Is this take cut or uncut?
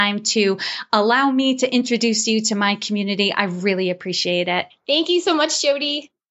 cut